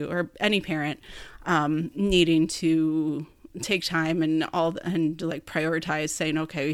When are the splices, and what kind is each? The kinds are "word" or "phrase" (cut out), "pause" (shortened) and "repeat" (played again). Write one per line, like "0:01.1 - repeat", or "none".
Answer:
0:03.5 - word